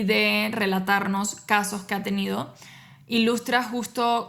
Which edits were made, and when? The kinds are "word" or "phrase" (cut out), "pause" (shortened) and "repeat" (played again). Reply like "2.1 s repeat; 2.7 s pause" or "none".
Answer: none